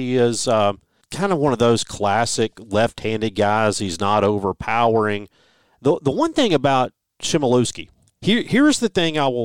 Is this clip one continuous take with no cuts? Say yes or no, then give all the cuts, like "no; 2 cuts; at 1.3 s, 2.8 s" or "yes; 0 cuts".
yes; 0 cuts